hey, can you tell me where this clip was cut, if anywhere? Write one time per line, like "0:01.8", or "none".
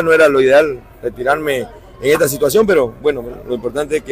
none